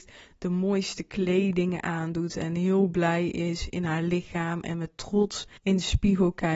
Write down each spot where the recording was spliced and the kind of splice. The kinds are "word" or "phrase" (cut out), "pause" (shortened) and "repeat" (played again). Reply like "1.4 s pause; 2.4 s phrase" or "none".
5.6 s pause